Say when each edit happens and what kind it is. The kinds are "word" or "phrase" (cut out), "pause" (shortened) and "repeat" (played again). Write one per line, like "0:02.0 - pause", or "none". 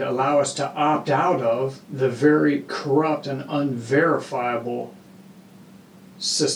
0:01.8 - pause